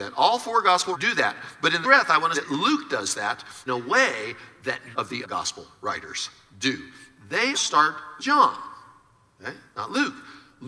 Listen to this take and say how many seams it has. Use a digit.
8